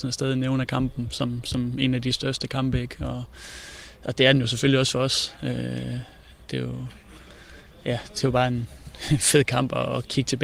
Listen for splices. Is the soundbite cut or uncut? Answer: uncut